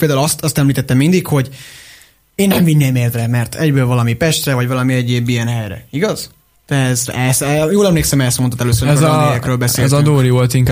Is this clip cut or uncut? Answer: uncut